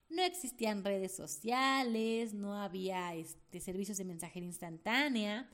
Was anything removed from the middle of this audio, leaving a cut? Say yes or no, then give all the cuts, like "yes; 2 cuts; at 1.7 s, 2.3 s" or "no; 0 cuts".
no; 0 cuts